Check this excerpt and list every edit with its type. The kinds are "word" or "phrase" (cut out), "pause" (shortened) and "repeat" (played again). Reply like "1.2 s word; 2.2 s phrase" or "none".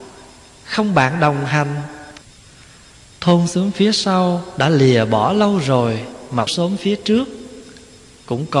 6.5 s word